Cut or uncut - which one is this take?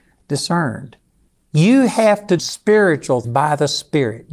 cut